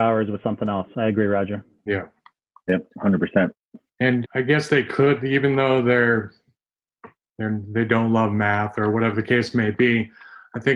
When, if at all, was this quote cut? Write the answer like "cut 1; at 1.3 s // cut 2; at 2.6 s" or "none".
cut 1; at 4.2 s